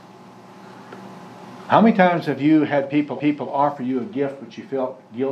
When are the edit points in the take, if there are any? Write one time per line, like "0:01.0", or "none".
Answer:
0:03.2